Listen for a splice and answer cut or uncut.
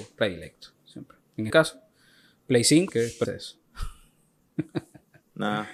cut